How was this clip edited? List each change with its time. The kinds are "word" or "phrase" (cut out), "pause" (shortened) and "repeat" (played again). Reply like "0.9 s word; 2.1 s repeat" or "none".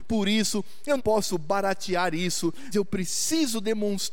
1.0 s word; 2.7 s word